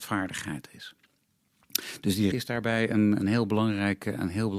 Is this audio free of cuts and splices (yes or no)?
no